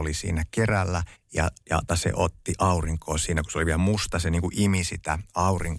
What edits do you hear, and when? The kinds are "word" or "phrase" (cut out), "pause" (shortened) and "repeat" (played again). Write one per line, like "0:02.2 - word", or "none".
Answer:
0:01.1 - pause
0:01.9 - word